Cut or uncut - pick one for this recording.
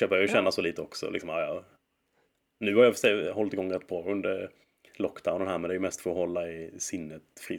uncut